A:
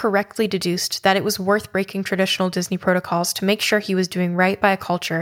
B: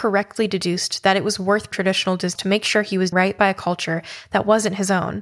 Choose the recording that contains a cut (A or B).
B